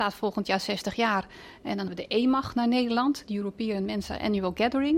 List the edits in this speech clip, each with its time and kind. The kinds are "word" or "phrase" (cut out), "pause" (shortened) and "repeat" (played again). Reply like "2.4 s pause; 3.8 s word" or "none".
1.9 s word